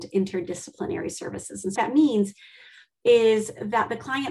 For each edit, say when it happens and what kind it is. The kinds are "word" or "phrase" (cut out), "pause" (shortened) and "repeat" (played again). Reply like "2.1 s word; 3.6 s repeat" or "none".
1.8 s word